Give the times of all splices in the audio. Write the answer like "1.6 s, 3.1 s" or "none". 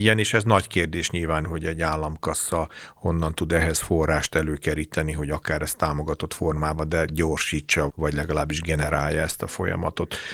1.4 s, 7.9 s